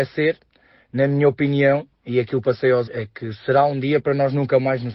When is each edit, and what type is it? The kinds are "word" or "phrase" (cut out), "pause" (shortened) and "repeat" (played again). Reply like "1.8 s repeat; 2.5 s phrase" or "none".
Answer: 2.4 s phrase; 2.9 s word